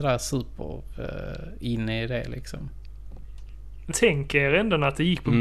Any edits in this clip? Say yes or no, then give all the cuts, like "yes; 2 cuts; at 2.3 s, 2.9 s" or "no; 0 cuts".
yes; 1 cut; at 3.9 s